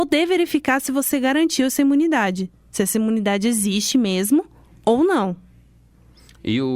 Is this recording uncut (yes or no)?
yes